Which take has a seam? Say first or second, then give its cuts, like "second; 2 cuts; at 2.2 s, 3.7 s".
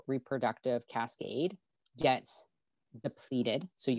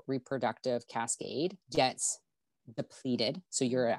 second; 1 cut; at 1.6 s